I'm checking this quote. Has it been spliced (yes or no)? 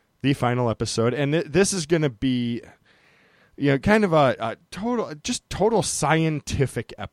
no